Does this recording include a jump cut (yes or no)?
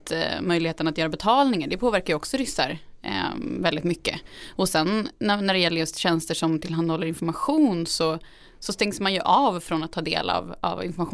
no